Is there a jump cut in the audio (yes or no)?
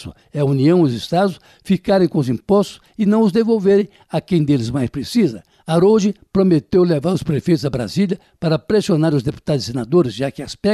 no